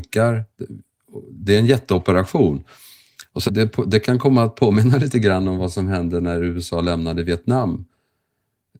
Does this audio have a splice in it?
yes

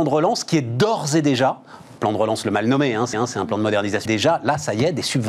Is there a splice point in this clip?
yes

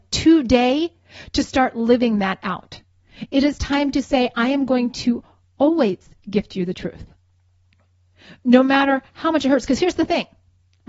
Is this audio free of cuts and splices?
yes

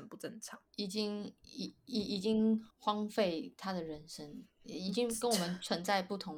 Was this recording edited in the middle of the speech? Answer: yes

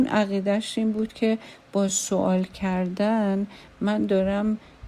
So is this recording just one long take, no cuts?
yes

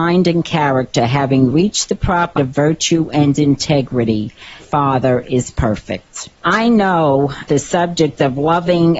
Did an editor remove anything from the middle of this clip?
yes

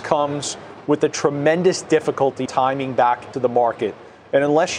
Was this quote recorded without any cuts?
no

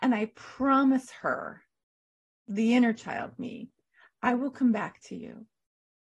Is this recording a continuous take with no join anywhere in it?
yes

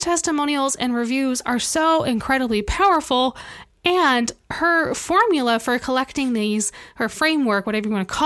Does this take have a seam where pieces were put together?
no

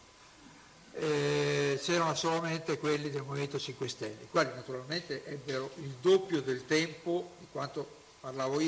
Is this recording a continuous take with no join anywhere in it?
yes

